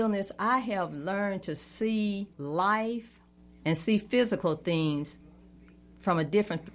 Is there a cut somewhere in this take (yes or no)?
yes